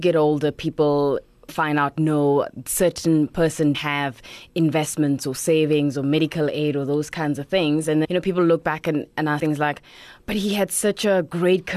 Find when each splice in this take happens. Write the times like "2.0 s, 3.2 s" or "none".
1.5 s, 3.7 s, 8.0 s, 9.4 s